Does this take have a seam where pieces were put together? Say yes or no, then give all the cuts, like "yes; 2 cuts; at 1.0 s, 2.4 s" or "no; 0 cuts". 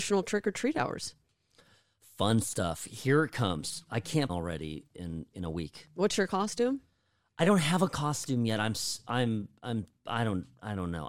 yes; 1 cut; at 4.3 s